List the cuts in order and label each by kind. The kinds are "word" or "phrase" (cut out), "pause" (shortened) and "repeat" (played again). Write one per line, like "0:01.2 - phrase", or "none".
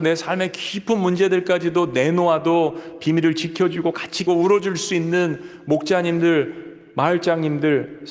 0:04.3 - word